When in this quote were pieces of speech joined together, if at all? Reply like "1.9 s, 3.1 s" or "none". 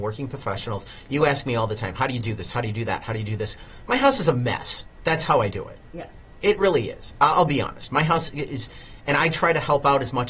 none